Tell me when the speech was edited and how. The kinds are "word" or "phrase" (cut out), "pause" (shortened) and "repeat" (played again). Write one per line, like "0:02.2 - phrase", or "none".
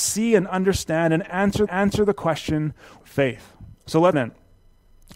0:01.7 - repeat
0:03.0 - phrase
0:03.7 - pause
0:04.1 - word